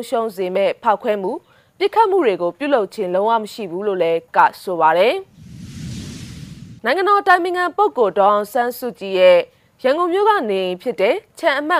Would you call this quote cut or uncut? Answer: cut